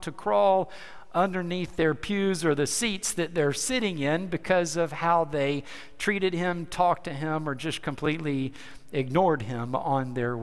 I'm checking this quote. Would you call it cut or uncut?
uncut